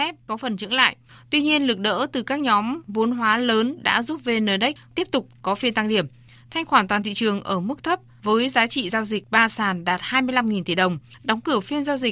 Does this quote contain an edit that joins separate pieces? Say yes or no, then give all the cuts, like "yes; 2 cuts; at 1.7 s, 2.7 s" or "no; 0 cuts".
no; 0 cuts